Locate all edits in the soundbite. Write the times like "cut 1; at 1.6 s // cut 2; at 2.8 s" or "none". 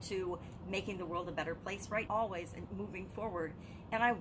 cut 1; at 2.1 s